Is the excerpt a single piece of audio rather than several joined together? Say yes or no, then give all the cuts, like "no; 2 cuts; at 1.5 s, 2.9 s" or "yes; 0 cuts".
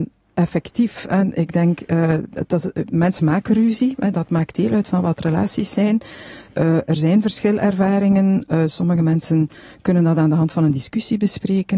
yes; 0 cuts